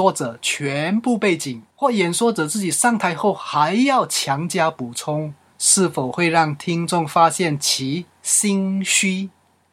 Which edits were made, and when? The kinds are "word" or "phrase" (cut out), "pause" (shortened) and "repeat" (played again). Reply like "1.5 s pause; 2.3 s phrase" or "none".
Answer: 1.7 s pause; 5.5 s pause